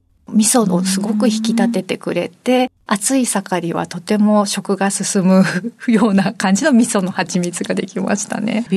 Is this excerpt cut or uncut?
cut